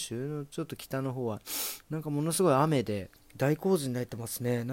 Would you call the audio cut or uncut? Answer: cut